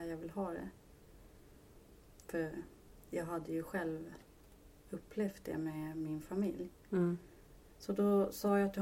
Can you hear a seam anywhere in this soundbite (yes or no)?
no